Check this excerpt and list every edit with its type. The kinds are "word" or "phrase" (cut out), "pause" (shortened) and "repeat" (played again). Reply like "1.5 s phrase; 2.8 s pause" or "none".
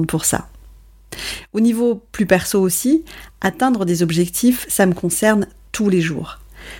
none